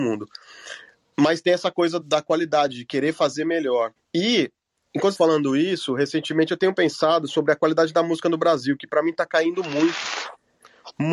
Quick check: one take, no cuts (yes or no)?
no